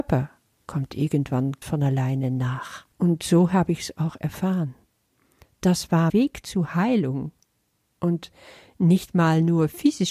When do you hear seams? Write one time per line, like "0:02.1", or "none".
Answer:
0:01.6
0:02.9
0:06.1